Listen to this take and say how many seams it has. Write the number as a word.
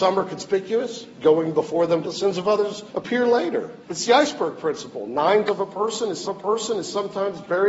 six